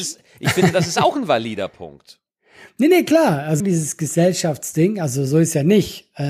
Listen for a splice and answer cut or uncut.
cut